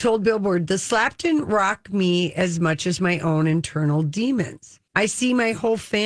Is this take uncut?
no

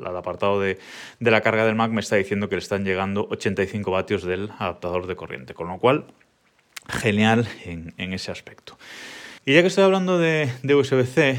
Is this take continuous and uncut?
no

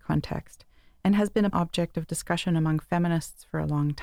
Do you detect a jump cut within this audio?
yes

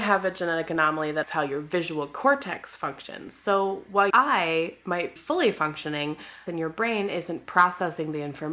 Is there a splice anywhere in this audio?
yes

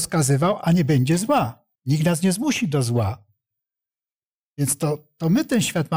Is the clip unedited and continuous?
no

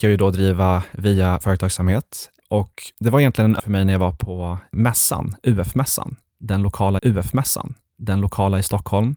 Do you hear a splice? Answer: yes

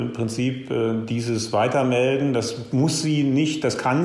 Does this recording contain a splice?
no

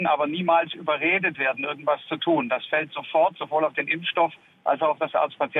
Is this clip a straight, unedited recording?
yes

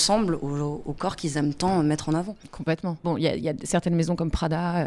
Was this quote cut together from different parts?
no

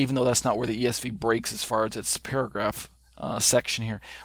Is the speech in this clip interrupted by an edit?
no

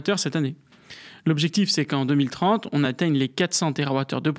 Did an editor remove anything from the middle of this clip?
no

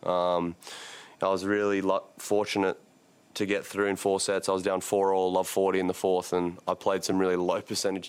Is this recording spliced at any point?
no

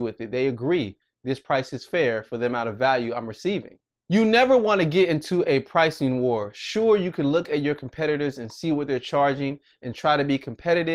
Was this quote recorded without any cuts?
yes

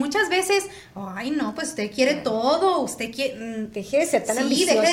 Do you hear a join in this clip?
no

